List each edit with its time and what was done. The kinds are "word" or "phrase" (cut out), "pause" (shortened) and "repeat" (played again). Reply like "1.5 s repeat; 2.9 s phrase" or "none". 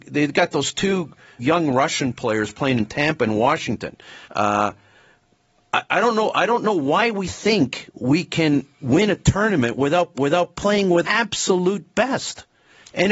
1.4 s word; 4.2 s pause; 8.7 s pause; 10.1 s repeat; 11.0 s word